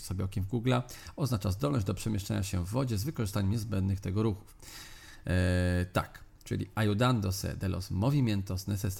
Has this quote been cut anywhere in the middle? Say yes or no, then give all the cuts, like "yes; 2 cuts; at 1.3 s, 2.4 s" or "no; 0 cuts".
no; 0 cuts